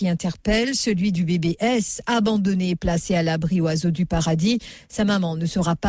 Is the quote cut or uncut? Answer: uncut